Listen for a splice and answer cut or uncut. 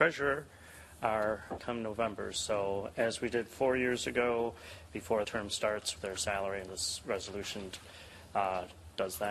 cut